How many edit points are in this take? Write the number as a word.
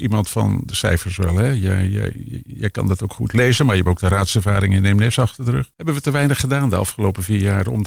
one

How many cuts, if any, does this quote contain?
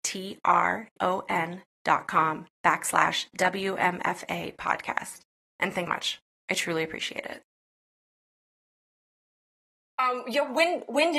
three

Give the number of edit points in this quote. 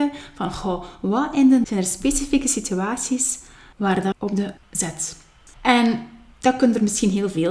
three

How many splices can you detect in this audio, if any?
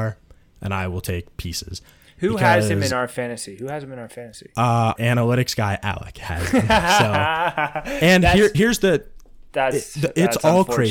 two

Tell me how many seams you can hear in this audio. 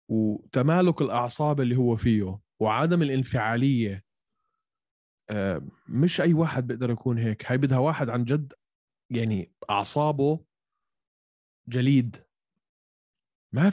zero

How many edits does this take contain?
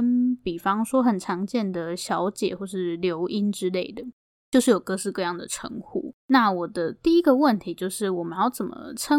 one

